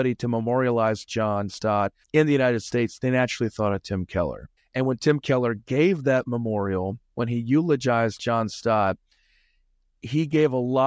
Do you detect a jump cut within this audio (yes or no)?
yes